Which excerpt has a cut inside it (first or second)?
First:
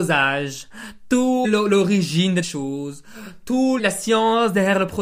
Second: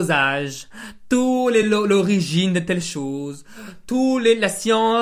first